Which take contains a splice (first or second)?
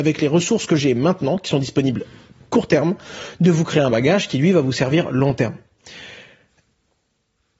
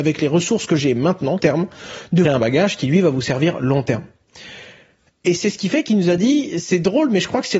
second